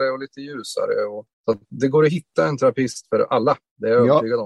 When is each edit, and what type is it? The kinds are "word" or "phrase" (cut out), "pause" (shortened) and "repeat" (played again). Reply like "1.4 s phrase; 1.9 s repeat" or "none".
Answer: 1.3 s pause